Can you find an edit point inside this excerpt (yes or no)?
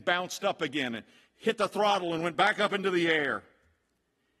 no